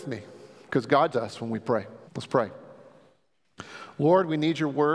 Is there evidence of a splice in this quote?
yes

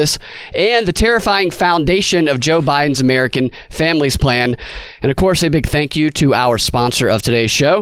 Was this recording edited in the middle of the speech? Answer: no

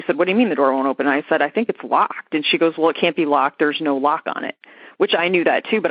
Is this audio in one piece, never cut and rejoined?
yes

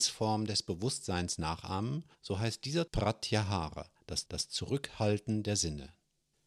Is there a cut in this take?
yes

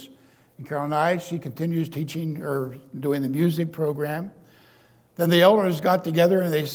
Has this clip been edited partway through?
no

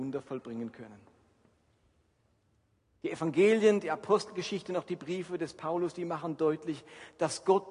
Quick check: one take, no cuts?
yes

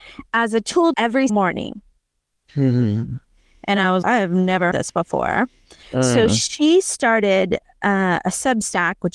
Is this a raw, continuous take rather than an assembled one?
no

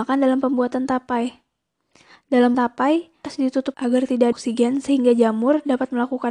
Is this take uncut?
no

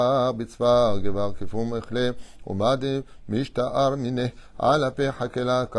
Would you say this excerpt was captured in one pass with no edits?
yes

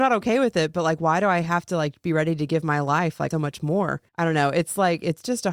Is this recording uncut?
no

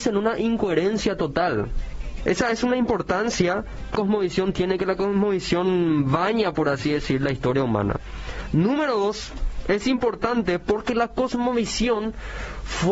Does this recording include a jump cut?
yes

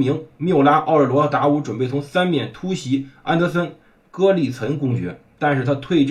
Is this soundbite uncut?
yes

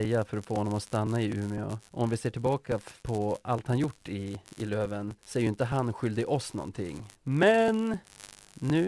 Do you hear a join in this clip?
yes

